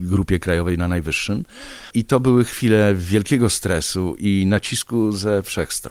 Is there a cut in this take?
no; 0 cuts

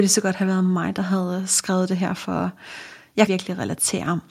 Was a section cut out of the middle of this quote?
yes; 1 cut; at 3.3 s

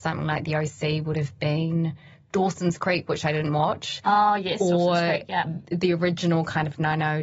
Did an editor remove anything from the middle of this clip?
no; 0 cuts

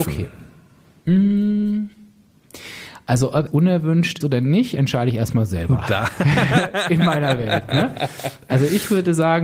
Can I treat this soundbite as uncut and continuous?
no; 2 cuts; at 3.5 s, 4.2 s

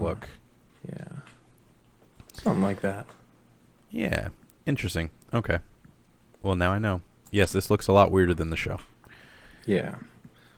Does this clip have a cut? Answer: no; 0 cuts

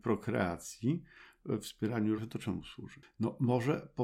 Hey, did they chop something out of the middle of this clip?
yes; 1 cut; at 2.2 s

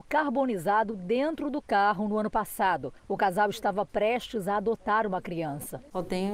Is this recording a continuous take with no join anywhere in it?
no; 1 cut; at 3.0 s

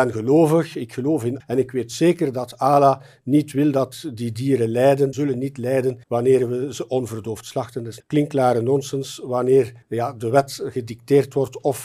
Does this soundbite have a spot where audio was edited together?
yes; 5 cuts; at 1.4 s, 5.1 s, 6.0 s, 8.0 s, 9.8 s

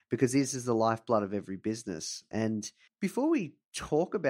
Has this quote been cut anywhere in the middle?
yes; 1 cut; at 2.9 s

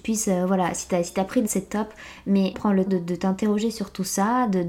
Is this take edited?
yes; 3 cuts; at 1.5 s, 2.5 s, 2.9 s

